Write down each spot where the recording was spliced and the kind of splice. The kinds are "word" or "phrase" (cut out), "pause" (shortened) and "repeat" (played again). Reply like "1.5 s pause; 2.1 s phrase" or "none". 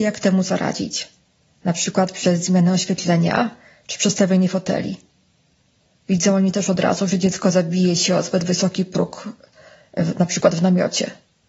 none